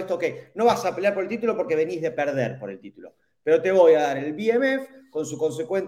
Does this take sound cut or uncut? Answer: uncut